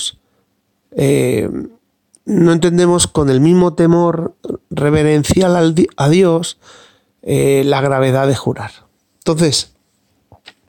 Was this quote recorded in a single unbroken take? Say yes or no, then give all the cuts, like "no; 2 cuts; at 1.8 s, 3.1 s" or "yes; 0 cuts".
yes; 0 cuts